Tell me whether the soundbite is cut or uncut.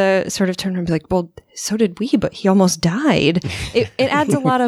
uncut